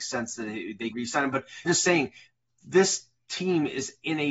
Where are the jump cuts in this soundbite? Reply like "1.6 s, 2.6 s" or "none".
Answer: 0.9 s, 1.7 s